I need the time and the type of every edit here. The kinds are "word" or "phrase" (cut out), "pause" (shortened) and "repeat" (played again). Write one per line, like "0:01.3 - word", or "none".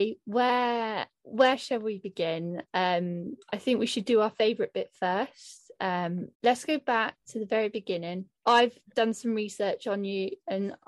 0:03.4 - pause
0:06.3 - pause
0:08.4 - pause